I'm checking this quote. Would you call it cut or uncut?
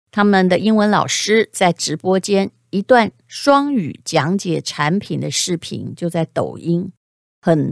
uncut